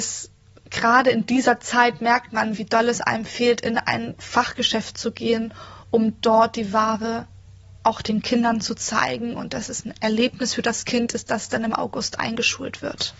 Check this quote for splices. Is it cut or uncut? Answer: uncut